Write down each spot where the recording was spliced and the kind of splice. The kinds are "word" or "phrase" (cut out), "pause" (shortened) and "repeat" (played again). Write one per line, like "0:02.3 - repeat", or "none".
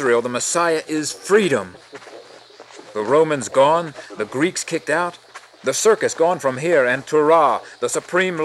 none